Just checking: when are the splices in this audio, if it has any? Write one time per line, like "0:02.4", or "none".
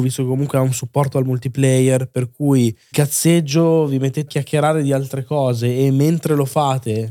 0:02.9
0:04.3

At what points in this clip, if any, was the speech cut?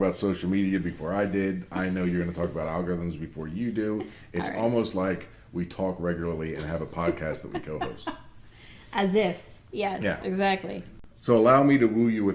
none

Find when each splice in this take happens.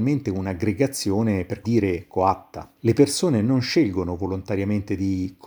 0:01.6
0:02.8

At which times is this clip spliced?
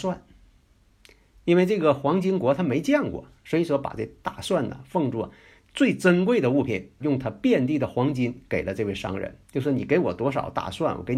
0:07.0
0:09.4

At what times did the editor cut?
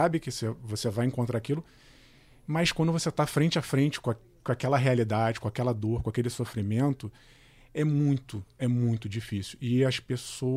none

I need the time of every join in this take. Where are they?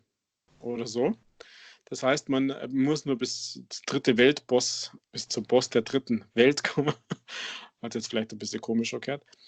0:05.0

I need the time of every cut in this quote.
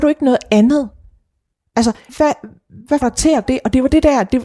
0:02.1
0:03.0
0:03.5

